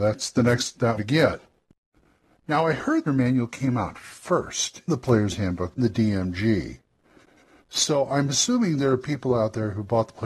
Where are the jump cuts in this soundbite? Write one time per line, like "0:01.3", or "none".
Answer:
0:01.0
0:03.1
0:04.9
0:05.8